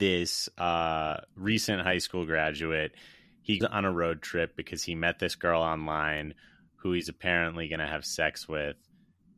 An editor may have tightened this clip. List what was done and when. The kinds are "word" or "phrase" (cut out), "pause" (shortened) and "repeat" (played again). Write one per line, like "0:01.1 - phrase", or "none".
0:03.6 - word